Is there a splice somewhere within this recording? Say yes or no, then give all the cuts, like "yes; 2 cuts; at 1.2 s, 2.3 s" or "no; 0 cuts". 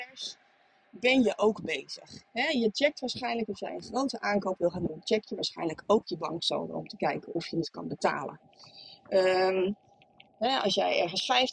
no; 0 cuts